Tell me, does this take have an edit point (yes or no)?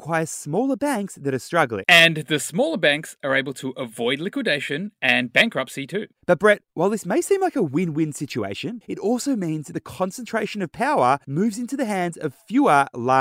no